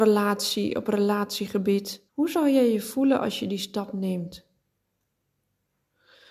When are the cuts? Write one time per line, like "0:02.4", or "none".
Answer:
0:02.1